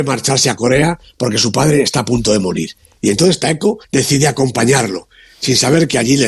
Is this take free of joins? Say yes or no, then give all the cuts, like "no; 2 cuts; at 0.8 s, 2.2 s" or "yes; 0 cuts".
no; 1 cut; at 3.8 s